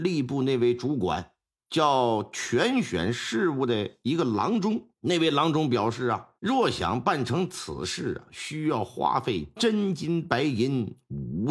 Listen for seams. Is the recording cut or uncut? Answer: cut